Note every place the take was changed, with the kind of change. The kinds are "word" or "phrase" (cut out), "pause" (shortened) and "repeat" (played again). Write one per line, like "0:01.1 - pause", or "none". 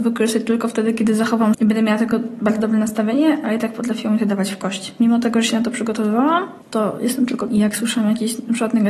0:01.5 - word
0:07.5 - word